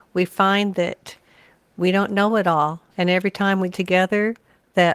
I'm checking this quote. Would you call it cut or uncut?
cut